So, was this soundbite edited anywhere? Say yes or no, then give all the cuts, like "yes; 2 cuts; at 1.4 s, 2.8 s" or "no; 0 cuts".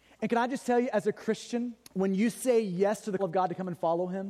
yes; 2 cuts; at 1.8 s, 3.2 s